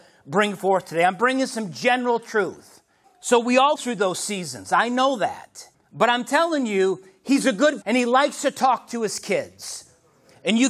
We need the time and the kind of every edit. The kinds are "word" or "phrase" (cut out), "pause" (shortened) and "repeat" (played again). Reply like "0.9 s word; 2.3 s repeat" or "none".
3.0 s pause; 3.8 s word; 5.7 s pause; 7.8 s word